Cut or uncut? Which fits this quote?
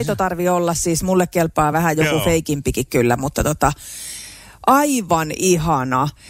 uncut